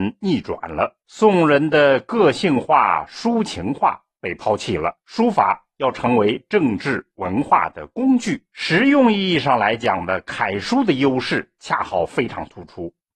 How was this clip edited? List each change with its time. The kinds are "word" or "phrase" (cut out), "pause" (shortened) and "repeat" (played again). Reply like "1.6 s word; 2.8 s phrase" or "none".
1.0 s pause; 5.0 s pause; 8.5 s pause

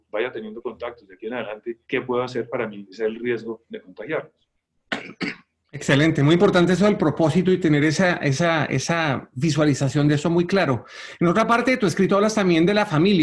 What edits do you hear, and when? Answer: 1.8 s pause

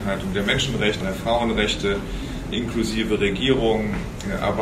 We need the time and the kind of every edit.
1.0 s word; 2.5 s word

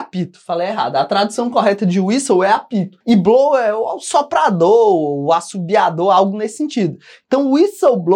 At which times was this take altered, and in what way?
3.0 s pause

